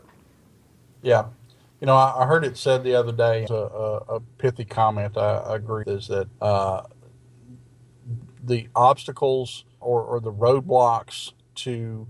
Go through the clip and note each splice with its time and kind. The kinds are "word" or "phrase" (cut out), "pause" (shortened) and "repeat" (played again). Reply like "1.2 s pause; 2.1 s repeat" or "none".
3.5 s phrase; 5.8 s word; 6.3 s pause; 9.8 s word